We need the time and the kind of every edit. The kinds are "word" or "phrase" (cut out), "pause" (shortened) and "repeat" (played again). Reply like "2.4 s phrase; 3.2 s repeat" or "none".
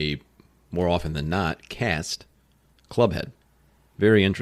none

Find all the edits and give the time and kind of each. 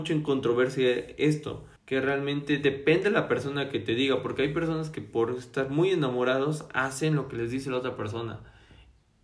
1.8 s pause

